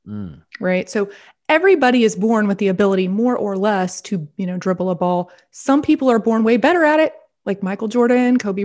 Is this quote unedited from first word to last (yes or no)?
yes